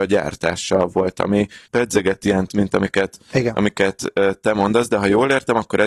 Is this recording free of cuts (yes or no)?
no